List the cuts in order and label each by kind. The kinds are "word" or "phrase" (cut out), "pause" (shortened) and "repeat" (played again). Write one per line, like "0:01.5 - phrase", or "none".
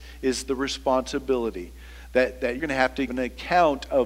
0:02.6 - word
0:03.1 - word